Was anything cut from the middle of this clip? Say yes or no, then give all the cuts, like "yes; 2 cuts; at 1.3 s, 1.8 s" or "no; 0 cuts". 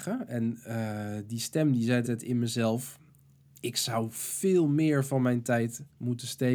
yes; 1 cut; at 2.0 s